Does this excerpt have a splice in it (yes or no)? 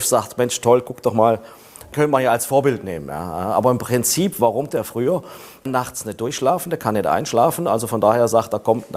yes